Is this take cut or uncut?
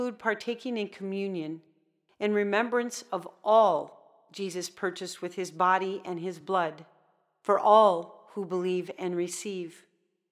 uncut